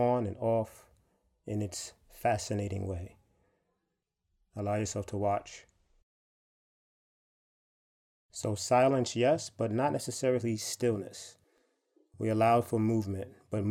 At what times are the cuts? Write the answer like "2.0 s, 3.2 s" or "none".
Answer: none